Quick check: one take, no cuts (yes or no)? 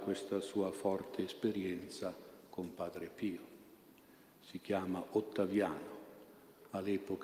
yes